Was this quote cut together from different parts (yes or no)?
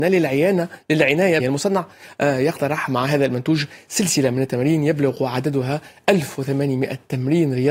yes